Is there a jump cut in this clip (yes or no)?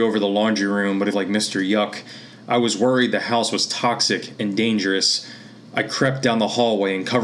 yes